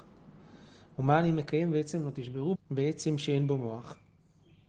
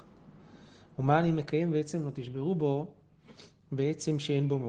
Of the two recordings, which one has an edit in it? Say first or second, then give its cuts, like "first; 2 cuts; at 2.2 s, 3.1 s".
first; 1 cut; at 2.5 s